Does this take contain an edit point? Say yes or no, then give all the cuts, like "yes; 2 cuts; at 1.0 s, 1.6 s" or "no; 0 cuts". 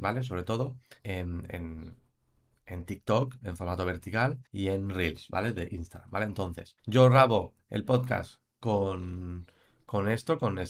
yes; 3 cuts; at 1.0 s, 4.5 s, 6.8 s